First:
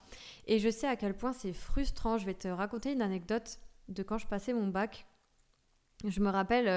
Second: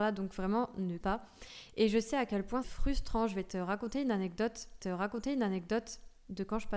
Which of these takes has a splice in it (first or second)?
second